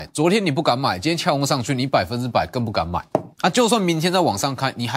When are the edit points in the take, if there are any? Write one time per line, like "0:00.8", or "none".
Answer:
0:03.3